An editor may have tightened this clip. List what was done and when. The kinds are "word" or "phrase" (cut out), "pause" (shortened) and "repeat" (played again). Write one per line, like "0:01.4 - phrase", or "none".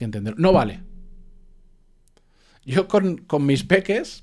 none